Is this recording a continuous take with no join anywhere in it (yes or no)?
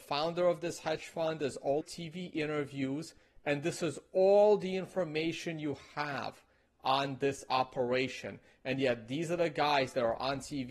no